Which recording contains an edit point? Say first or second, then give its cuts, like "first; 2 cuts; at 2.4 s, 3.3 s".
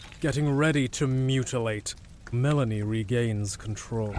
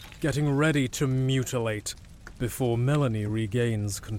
first; 1 cut; at 2.3 s